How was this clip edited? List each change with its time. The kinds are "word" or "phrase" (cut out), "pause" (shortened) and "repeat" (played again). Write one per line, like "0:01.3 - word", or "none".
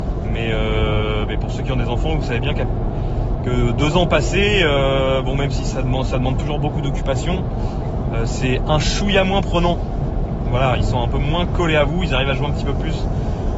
none